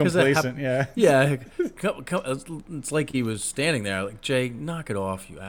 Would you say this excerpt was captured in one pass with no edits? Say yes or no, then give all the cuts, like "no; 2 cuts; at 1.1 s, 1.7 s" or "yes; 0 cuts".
yes; 0 cuts